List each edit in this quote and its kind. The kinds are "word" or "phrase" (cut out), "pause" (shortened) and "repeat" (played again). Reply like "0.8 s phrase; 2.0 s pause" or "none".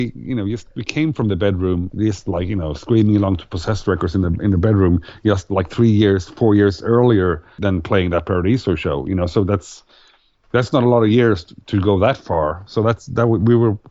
none